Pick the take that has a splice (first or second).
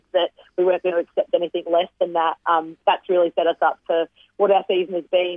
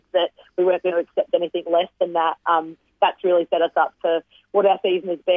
first